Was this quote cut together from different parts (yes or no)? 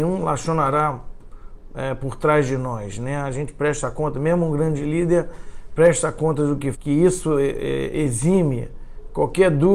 yes